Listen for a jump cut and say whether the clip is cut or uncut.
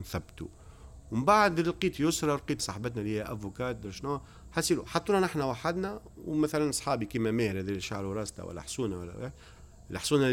cut